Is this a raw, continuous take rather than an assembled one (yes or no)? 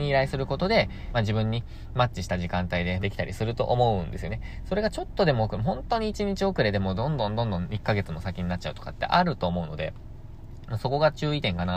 no